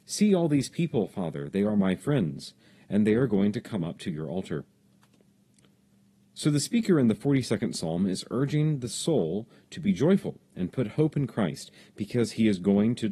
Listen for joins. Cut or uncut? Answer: uncut